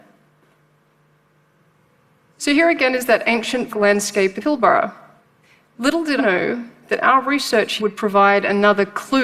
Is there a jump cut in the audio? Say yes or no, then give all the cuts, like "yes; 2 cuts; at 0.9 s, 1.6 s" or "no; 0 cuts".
yes; 4 cuts; at 3.7 s, 4.4 s, 6.2 s, 7.8 s